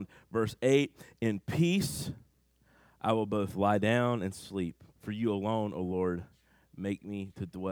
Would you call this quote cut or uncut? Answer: cut